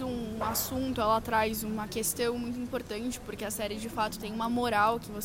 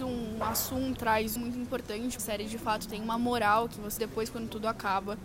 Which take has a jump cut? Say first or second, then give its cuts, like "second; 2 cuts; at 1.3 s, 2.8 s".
second; 4 cuts; at 1.0 s, 1.4 s, 2.2 s, 4.0 s